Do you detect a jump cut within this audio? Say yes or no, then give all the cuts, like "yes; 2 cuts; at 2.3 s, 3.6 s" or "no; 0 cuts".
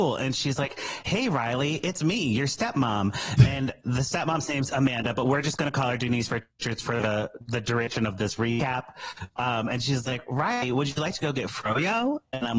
no; 0 cuts